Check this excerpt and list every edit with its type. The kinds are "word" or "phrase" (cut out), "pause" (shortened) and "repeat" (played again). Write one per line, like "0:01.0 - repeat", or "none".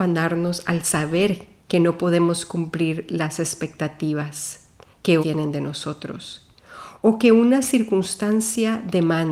0:01.6 - pause
0:05.2 - word